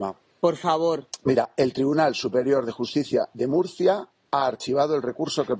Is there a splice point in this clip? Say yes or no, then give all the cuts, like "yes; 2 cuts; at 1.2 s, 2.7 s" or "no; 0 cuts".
no; 0 cuts